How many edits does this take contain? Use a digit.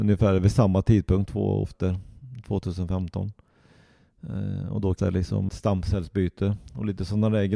3